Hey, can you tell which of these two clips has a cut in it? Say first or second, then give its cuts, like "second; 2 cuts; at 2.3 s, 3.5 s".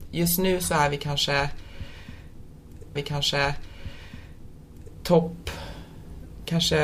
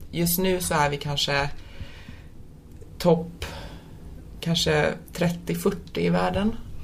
first; 1 cut; at 3.0 s